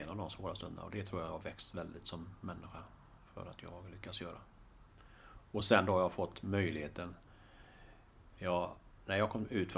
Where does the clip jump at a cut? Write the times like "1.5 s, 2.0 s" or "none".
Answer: none